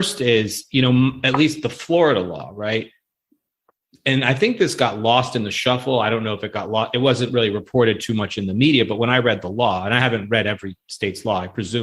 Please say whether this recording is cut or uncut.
uncut